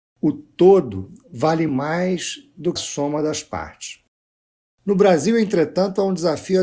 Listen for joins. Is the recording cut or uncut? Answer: cut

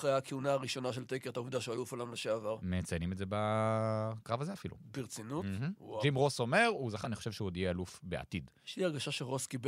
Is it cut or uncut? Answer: cut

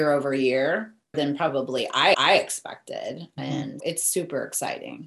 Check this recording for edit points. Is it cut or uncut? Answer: cut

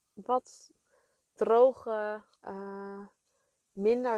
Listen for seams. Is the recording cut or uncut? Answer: cut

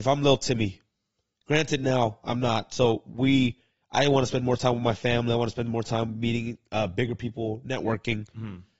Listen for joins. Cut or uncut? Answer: uncut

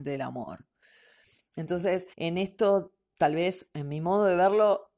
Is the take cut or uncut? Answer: cut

